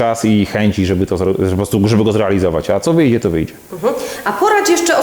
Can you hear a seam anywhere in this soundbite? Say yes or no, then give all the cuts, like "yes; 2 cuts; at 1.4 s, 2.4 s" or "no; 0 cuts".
no; 0 cuts